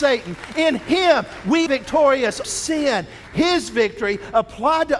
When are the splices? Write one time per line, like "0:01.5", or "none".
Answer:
0:01.7
0:02.4